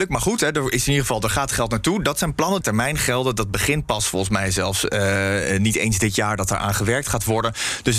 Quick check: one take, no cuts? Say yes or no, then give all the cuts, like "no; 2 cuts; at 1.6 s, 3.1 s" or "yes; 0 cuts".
no; 1 cut; at 2.6 s